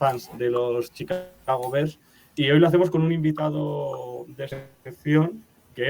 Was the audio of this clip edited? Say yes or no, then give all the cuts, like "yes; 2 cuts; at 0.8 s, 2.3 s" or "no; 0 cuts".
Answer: no; 0 cuts